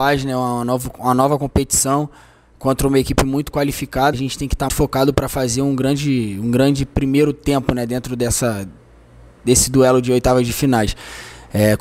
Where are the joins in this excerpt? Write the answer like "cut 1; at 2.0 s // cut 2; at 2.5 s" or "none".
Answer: cut 1; at 4.1 s // cut 2; at 4.7 s